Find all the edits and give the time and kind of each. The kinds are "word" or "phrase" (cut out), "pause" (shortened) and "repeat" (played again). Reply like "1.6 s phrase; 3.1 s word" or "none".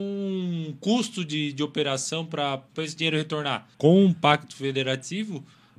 3.7 s pause